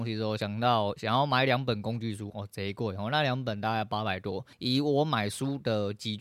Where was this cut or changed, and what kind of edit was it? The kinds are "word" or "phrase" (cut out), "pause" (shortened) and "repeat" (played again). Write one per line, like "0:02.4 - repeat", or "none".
0:04.5 - pause